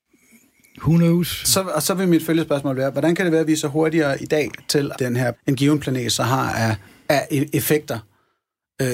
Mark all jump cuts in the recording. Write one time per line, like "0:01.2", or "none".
0:04.9
0:05.3
0:06.8

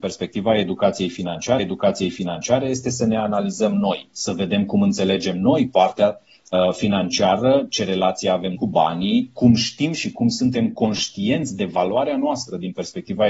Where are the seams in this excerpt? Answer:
0:01.6
0:08.6

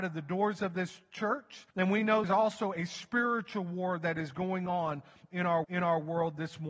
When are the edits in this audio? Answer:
0:01.7
0:02.2
0:05.6

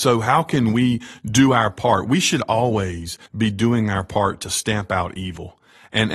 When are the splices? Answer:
0:03.3

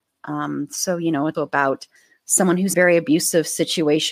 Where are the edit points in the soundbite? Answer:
0:01.3
0:02.0
0:02.7

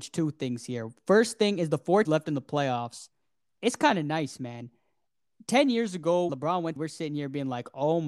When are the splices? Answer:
0:02.0
0:06.3
0:06.8

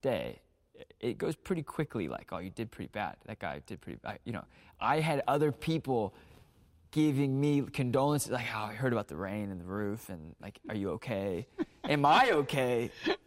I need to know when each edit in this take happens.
none

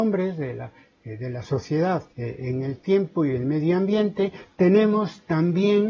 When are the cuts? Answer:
0:02.1

